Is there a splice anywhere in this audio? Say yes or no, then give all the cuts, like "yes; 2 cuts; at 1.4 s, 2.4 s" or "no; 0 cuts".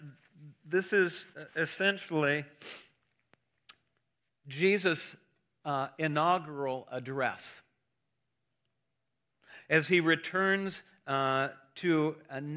no; 0 cuts